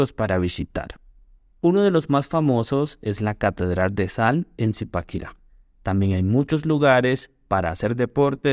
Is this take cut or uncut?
cut